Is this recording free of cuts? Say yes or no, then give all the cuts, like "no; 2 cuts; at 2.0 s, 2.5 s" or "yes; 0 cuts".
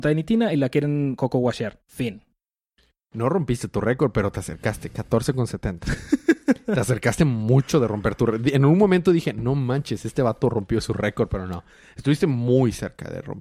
yes; 0 cuts